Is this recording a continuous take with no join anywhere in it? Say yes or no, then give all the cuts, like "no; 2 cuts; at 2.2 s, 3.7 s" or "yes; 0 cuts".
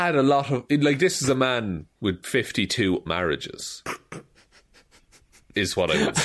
no; 2 cuts; at 1.9 s, 3.1 s